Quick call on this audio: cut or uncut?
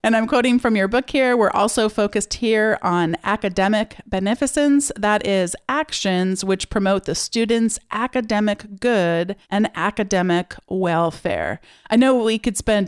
cut